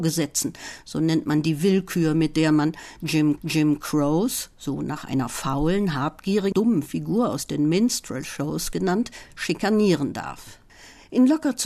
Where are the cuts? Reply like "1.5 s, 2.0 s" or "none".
3.4 s, 6.5 s